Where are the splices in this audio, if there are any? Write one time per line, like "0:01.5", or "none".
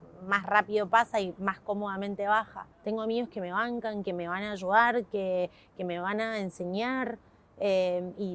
0:02.7